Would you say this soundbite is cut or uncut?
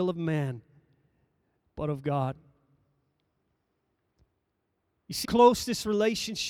cut